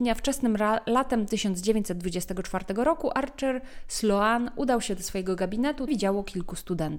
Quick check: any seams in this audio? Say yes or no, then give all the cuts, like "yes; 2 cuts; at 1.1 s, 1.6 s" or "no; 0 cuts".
yes; 1 cut; at 5.9 s